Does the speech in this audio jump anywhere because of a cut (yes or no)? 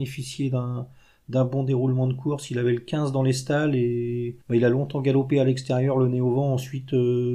yes